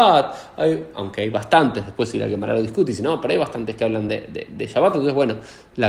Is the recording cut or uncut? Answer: uncut